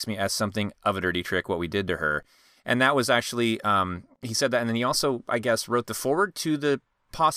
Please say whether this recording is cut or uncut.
uncut